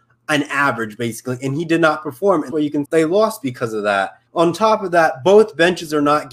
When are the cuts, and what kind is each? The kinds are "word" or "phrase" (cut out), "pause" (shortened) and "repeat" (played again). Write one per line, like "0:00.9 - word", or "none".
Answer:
0:02.5 - word
0:02.8 - word
0:04.3 - pause